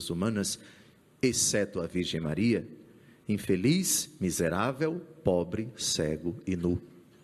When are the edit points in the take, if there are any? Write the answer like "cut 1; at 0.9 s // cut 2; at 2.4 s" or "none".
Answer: none